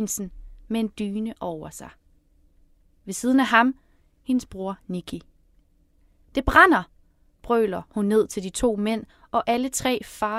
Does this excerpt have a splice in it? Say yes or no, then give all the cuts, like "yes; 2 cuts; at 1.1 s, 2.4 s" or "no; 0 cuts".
no; 0 cuts